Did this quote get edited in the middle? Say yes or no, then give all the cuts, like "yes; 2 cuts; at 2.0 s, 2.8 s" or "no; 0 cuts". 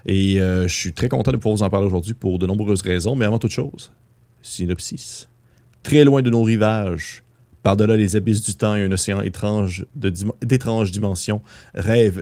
no; 0 cuts